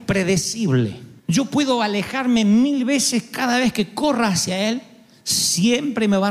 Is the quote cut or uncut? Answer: cut